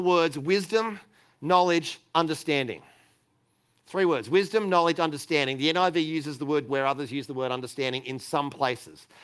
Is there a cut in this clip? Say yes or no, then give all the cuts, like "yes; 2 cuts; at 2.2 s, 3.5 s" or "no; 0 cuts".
yes; 1 cut; at 6.7 s